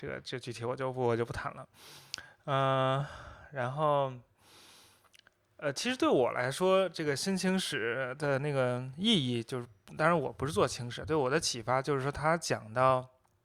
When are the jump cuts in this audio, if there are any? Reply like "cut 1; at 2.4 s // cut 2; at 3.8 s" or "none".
none

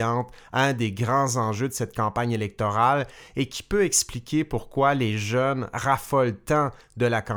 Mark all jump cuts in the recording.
none

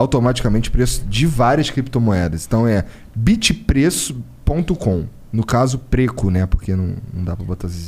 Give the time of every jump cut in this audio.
none

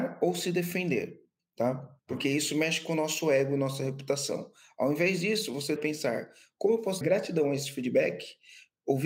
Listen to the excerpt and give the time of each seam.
cut 1; at 2.0 s // cut 2; at 5.8 s // cut 3; at 7.0 s

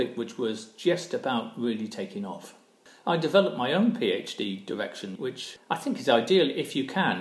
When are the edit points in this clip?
cut 1; at 5.1 s

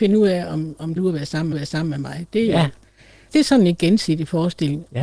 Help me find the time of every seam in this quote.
cut 1; at 1.0 s // cut 2; at 1.5 s // cut 3; at 3.3 s

